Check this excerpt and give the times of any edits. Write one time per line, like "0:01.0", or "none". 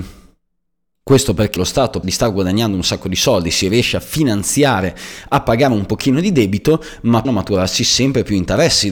0:01.6
0:02.0
0:07.2